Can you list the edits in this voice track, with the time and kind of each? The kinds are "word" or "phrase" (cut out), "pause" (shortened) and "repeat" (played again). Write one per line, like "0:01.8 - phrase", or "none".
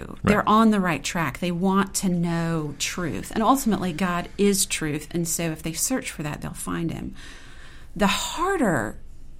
none